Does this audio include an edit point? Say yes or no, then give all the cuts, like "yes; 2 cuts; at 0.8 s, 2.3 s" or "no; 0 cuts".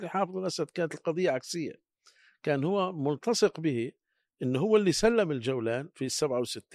no; 0 cuts